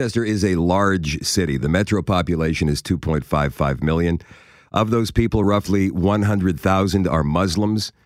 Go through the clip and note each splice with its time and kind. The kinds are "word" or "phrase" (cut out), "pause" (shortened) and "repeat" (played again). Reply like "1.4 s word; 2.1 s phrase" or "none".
none